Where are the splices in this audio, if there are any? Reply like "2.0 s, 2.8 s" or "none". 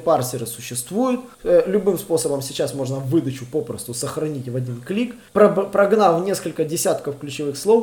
1.3 s, 5.3 s